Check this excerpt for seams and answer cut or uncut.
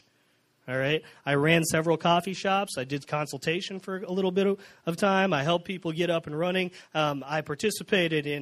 uncut